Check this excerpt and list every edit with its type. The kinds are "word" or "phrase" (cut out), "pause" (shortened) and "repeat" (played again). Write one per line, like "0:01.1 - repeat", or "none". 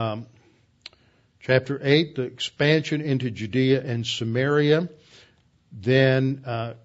none